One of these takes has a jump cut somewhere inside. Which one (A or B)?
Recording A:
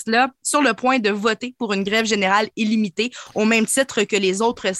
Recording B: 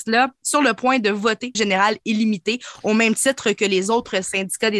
B